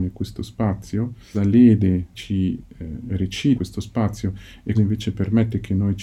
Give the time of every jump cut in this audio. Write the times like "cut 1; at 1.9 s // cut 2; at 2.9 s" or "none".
cut 1; at 1.3 s // cut 2; at 2.1 s // cut 3; at 3.5 s // cut 4; at 4.7 s